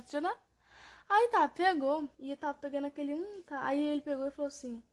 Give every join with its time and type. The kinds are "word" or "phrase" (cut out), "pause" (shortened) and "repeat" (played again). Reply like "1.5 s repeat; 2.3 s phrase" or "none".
2.1 s pause